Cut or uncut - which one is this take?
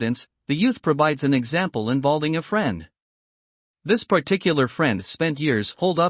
uncut